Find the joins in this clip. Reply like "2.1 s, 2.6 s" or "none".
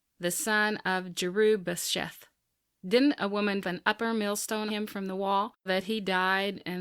3.6 s, 4.7 s, 5.7 s